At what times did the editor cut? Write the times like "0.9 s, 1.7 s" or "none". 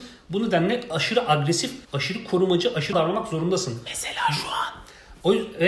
1.8 s, 2.9 s